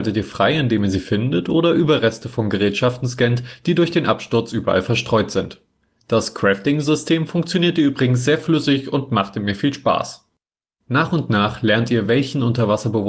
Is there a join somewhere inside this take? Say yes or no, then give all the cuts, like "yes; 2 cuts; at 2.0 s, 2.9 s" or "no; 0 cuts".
no; 0 cuts